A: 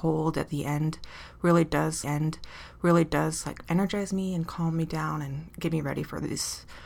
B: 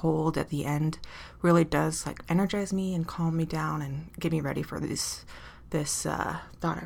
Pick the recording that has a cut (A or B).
A